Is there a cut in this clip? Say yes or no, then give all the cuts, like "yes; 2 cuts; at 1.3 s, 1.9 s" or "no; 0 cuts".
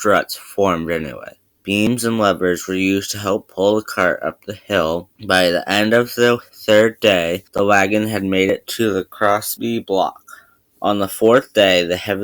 no; 0 cuts